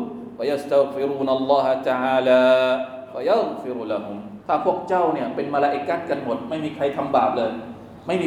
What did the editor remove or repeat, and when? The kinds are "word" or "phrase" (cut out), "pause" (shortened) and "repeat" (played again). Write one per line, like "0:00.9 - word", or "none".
0:04.4 - pause